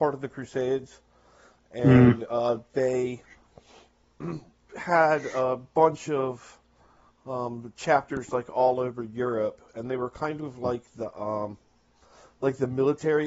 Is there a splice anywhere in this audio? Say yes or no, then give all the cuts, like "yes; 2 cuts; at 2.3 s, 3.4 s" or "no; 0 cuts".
no; 0 cuts